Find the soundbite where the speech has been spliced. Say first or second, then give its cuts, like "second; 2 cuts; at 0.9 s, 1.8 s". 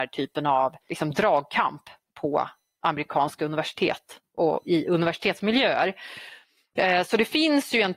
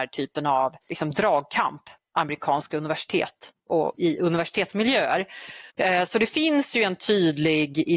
second; 2 cuts; at 2.0 s, 5.7 s